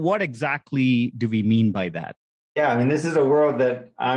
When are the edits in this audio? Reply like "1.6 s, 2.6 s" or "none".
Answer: none

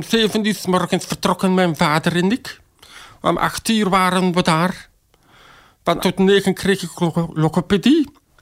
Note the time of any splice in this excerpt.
6.0 s

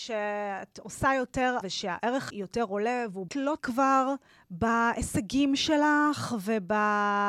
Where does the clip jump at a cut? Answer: 1.6 s, 2.3 s, 3.3 s, 3.6 s, 4.3 s

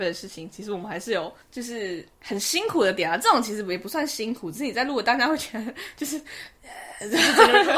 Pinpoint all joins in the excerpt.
1.4 s, 2.1 s

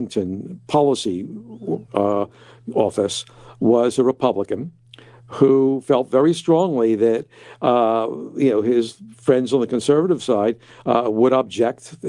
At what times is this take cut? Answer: none

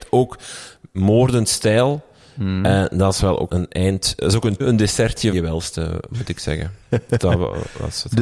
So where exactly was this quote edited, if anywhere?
3.5 s, 4.6 s, 5.3 s, 7.2 s

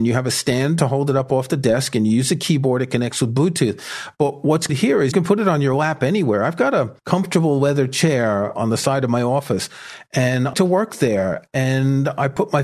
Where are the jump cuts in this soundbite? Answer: 4.7 s, 5.1 s, 7.0 s, 8.6 s, 10.5 s

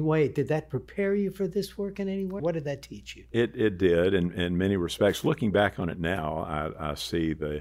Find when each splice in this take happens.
2.4 s

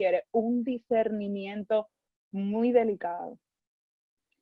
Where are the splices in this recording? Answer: none

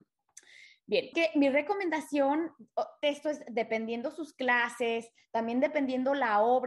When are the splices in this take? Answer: 1.1 s, 3.0 s

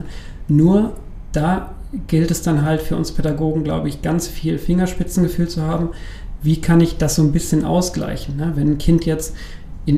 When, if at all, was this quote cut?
none

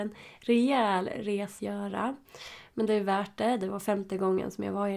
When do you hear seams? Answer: 1.6 s

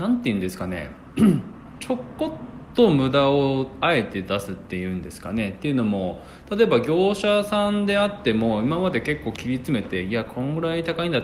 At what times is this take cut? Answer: none

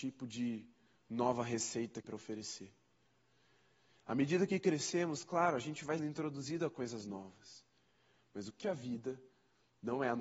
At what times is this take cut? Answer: 2.0 s, 6.0 s, 8.6 s

